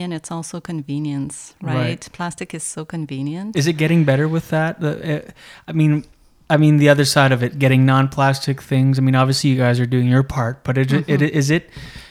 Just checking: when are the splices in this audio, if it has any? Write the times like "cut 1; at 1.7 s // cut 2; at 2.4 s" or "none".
cut 1; at 6.2 s